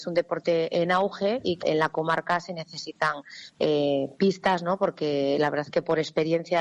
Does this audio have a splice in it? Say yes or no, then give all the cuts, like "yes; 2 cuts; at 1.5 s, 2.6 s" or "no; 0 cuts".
yes; 1 cut; at 1.6 s